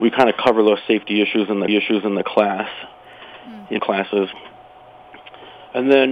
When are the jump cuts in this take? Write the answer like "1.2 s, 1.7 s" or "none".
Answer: 1.7 s, 3.8 s